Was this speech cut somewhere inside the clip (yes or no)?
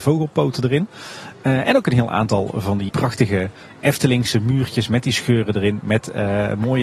yes